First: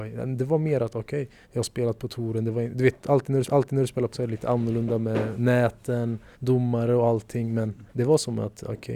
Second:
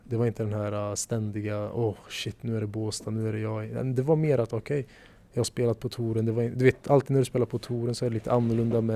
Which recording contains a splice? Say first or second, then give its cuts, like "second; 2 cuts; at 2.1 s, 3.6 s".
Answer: first; 5 cuts; at 1.4 s, 3.4 s, 4.1 s, 6.3 s, 7.9 s